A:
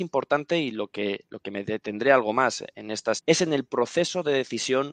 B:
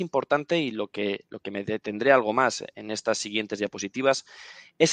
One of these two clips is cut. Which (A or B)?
A